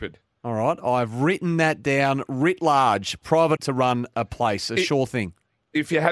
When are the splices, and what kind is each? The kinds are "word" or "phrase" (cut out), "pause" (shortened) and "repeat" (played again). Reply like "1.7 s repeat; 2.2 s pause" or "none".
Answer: 3.6 s word